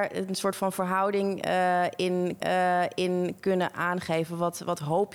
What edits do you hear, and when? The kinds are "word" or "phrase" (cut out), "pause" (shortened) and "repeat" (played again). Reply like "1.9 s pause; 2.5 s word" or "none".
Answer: 2.4 s repeat